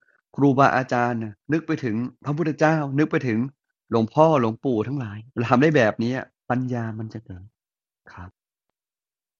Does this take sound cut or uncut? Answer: cut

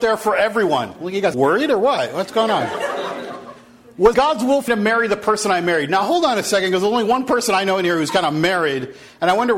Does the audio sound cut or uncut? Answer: cut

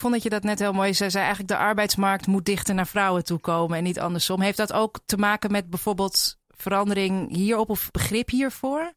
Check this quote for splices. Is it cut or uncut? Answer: uncut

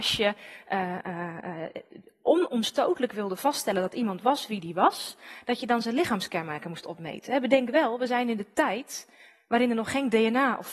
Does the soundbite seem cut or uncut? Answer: uncut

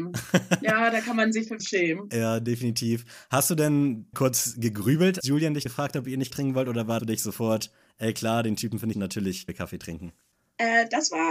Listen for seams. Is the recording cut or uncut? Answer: cut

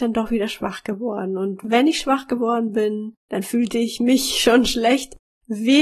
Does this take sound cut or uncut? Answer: cut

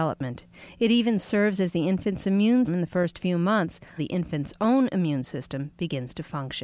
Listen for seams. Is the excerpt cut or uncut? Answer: cut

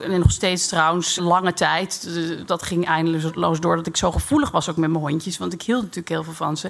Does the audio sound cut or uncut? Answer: cut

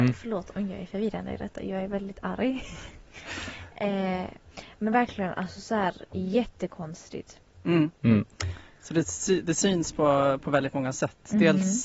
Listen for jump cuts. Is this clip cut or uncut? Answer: cut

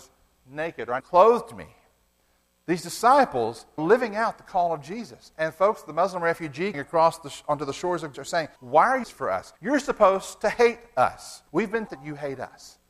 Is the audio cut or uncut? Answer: cut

